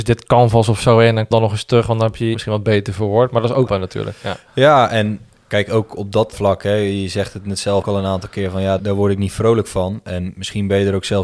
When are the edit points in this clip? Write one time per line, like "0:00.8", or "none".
0:01.3
0:02.3
0:03.7
0:06.3
0:07.8
0:08.8